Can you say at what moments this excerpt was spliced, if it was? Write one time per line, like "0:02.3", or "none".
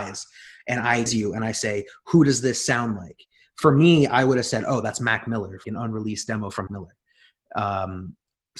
0:01.1
0:05.6
0:06.7

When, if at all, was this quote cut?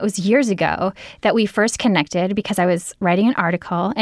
none

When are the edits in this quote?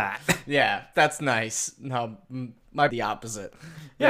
0:00.9
0:02.9

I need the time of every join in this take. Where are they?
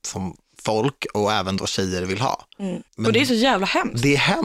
0:02.9

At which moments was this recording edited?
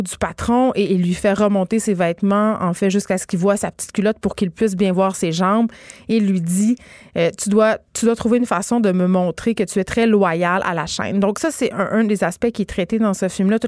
none

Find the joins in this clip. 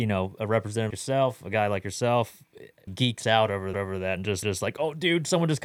0:00.9
0:02.9
0:03.7
0:04.4

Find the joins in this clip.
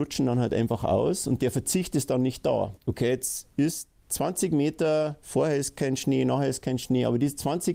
none

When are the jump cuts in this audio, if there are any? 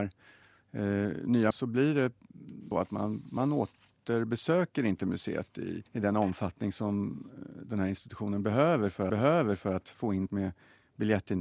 0:01.5
0:02.7
0:05.9
0:09.1
0:10.3

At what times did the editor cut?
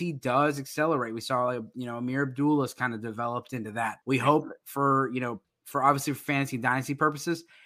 0:04.0
0:05.4

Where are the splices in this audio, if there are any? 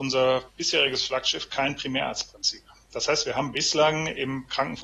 none

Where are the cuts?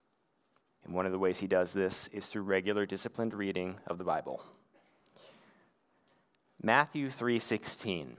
none

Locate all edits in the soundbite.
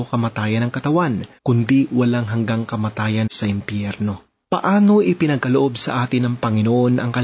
0:01.4
0:03.3
0:04.4

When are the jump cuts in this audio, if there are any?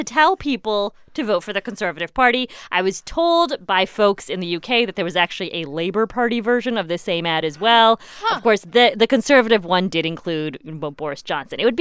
none

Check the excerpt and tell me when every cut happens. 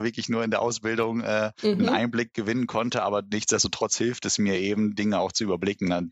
none

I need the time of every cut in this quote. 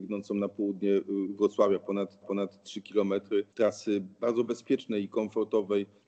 0:02.2
0:03.5

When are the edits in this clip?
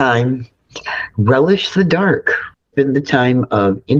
0:02.7

